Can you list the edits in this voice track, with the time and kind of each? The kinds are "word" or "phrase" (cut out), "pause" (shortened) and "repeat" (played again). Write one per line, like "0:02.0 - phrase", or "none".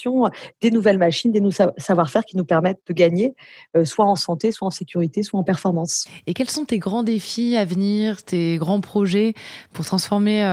none